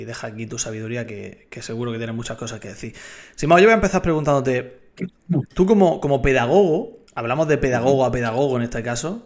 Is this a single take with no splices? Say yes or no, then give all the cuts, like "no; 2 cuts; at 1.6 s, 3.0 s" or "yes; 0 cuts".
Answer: no; 2 cuts; at 5.5 s, 7.1 s